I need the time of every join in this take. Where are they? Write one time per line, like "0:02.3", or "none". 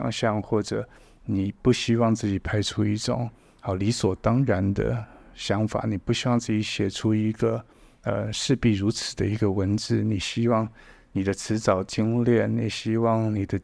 none